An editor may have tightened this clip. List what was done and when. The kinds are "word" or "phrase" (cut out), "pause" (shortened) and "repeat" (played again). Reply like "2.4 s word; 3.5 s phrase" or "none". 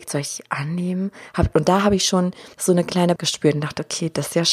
2.5 s pause; 3.2 s word